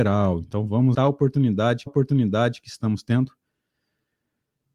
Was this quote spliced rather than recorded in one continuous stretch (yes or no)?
yes